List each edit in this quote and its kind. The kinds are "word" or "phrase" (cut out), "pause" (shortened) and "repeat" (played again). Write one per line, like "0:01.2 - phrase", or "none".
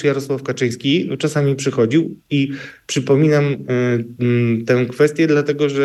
none